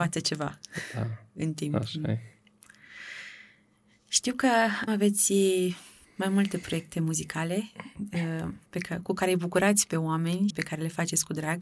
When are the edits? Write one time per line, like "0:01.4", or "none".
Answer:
0:04.9
0:06.0
0:08.7
0:10.5

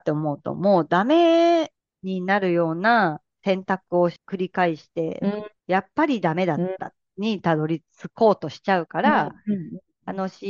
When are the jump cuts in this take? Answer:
0:01.8
0:04.2
0:05.6

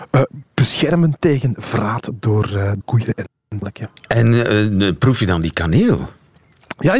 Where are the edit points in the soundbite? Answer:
0:02.8

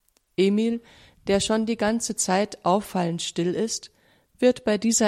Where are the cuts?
none

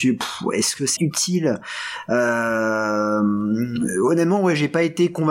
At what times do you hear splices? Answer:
0:01.0

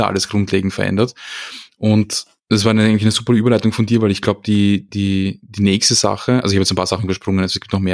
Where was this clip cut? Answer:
0:02.4

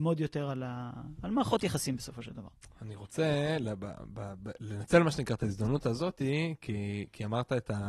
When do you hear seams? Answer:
none

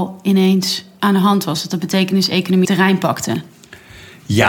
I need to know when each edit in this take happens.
0:02.6

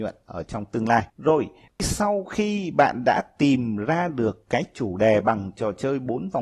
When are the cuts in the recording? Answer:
0:01.1

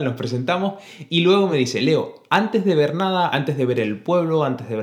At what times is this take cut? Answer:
none

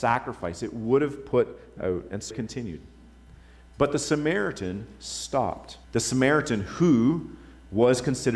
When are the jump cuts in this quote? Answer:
0:01.8
0:02.3
0:05.8

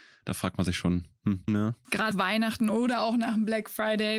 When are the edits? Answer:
0:01.5
0:02.1

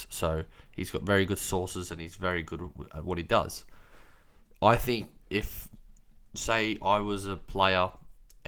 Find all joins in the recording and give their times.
none

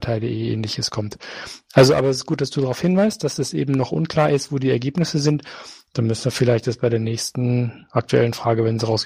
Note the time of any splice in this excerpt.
none

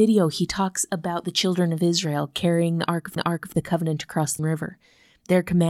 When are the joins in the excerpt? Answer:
0:03.2
0:04.4

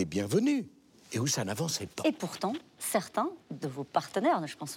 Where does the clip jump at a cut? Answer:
0:03.4

